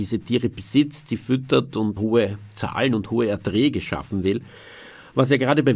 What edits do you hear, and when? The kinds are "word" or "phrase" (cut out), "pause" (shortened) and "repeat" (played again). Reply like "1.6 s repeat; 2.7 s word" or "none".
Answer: 2.0 s word

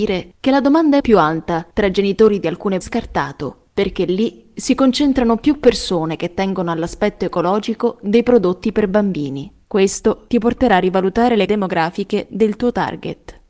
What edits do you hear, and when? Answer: 1.0 s word; 1.7 s pause; 2.8 s phrase; 9.6 s pause; 11.5 s word

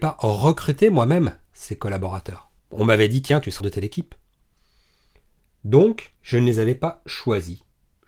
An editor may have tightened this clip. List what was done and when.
2.6 s pause; 3.6 s word; 6.2 s pause

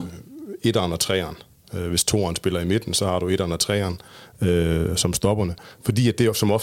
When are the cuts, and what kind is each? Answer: none

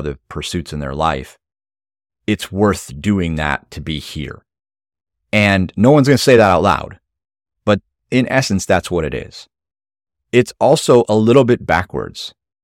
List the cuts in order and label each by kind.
none

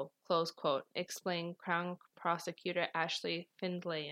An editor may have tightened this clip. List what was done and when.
none

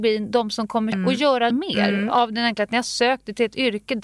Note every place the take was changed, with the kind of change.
0.9 s phrase; 1.5 s word

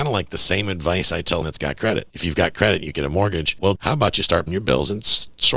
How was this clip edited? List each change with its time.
1.4 s word; 1.8 s word; 2.5 s word; 2.9 s word; 3.8 s word; 4.5 s word

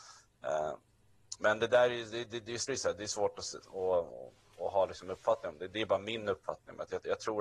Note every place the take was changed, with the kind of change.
2.7 s word; 3.6 s word

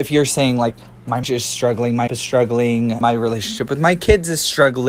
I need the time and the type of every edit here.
1.2 s word; 2.1 s word; 3.0 s word

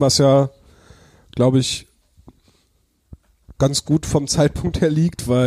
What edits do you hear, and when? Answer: 3.5 s pause

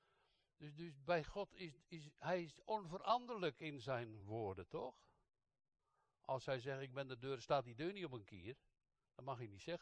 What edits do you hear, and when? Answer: none

